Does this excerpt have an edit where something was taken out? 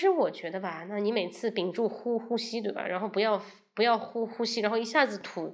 no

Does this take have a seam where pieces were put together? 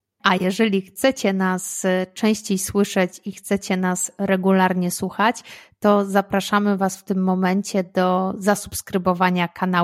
no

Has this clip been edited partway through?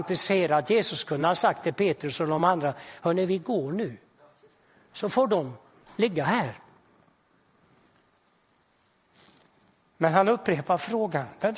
no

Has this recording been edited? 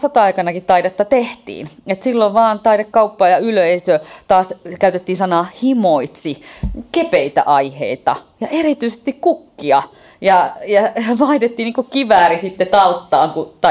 no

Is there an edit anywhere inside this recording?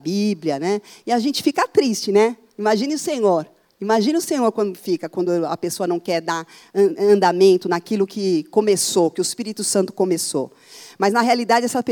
no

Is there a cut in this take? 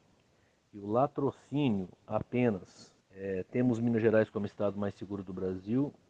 yes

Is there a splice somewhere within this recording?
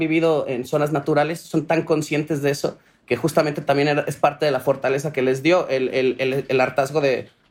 no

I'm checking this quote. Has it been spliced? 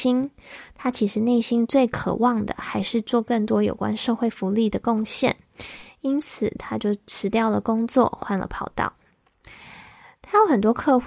no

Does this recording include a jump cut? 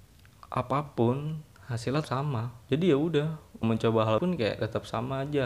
yes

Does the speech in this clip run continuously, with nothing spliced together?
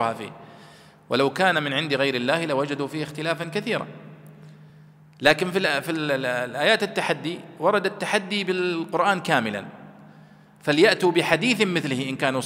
yes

